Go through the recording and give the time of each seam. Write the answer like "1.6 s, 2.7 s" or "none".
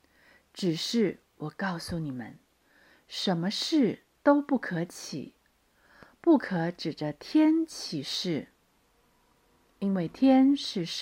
none

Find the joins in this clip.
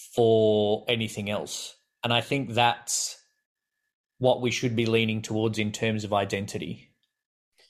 none

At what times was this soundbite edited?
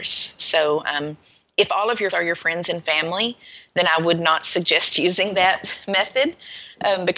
2.1 s

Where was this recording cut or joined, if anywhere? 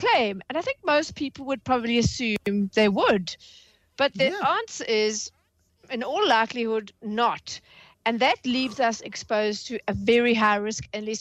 none

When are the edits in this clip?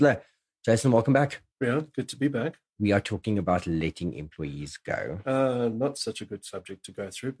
1.5 s, 2.7 s

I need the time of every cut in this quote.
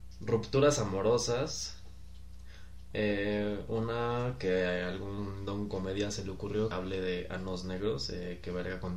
6.7 s

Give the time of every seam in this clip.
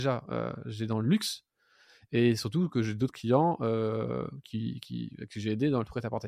none

